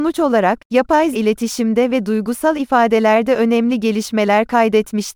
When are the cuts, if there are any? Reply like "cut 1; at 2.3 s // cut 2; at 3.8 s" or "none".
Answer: cut 1; at 1.1 s